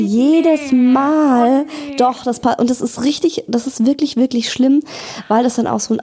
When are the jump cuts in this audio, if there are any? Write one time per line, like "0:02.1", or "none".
none